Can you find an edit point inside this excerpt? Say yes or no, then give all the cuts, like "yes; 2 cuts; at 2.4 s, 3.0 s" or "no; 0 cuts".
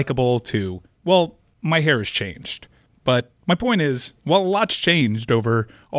yes; 2 cuts; at 0.9 s, 4.2 s